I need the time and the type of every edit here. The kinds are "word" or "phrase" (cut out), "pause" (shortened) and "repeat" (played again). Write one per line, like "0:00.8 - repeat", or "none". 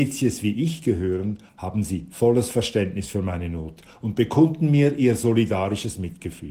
0:01.5 - pause